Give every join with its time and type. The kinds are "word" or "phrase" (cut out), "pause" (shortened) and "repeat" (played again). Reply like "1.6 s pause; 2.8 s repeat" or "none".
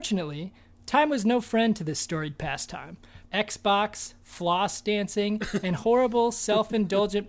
3.3 s word